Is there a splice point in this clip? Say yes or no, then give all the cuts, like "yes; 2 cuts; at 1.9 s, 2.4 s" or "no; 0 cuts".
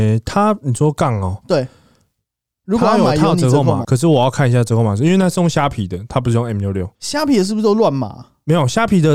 yes; 2 cuts; at 3.8 s, 6.9 s